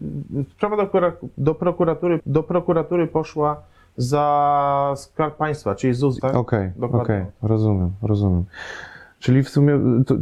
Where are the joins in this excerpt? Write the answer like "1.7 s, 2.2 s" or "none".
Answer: 2.2 s, 6.2 s